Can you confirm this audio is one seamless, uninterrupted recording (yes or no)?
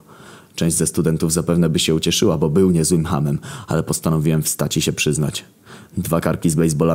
yes